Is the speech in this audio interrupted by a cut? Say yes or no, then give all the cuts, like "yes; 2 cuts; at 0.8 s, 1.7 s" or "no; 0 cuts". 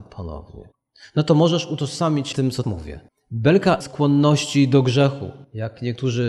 yes; 3 cuts; at 2.3 s, 2.6 s, 3.8 s